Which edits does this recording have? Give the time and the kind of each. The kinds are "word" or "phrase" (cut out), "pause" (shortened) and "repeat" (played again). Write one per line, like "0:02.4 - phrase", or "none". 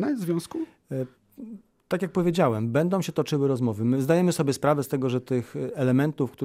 none